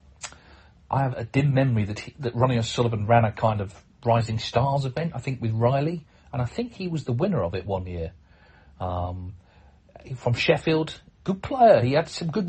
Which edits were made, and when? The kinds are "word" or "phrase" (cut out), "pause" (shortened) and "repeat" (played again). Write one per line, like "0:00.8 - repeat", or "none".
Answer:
0:01.1 - word